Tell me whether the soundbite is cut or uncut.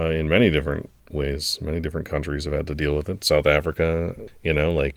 uncut